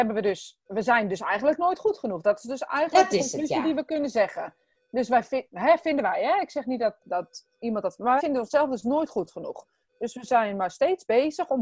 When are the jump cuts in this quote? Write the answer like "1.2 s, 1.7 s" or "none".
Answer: 7.0 s, 8.2 s

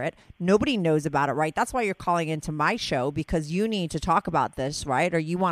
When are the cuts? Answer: none

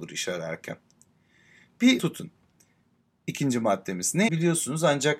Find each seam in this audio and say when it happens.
2.0 s, 4.3 s

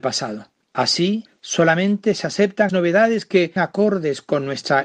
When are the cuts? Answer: 2.7 s, 3.6 s

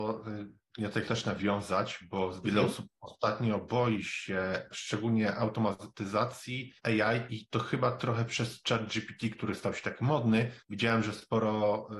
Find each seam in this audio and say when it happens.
1.1 s, 6.8 s, 10.6 s

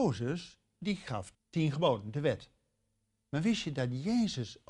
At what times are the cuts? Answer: 1.3 s

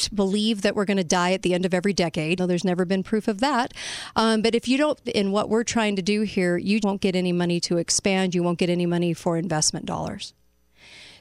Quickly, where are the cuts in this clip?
2.4 s, 5.1 s, 6.8 s

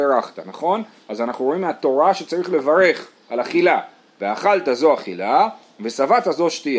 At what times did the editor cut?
none

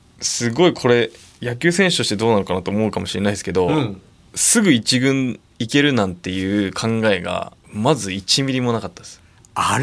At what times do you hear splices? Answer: 7.6 s

